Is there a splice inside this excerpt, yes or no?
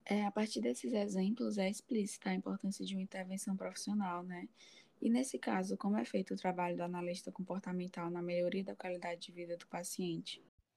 no